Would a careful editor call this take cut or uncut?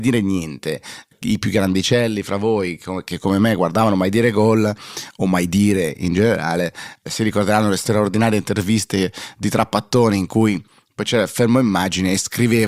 uncut